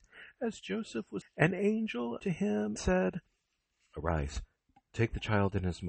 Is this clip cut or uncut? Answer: cut